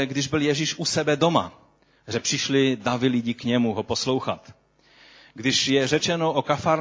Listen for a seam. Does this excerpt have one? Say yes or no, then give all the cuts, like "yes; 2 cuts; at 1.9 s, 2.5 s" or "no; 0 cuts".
no; 0 cuts